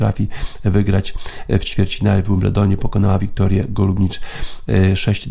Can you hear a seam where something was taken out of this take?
no; 0 cuts

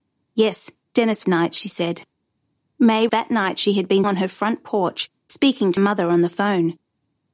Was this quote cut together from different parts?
yes; 4 cuts; at 1.2 s, 3.1 s, 4.0 s, 5.8 s

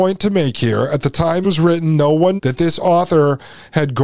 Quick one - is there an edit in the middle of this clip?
yes; 2 cuts; at 1.4 s, 2.4 s

